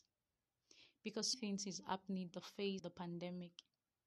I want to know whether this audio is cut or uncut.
cut